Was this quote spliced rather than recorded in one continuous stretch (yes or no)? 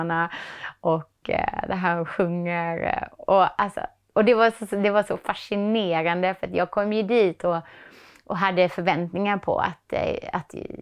no